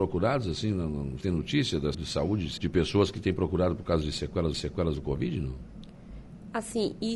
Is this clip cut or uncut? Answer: cut